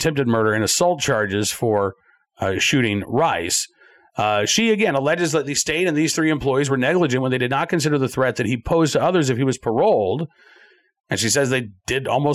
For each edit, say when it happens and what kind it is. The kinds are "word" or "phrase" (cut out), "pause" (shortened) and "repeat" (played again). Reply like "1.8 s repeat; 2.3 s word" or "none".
none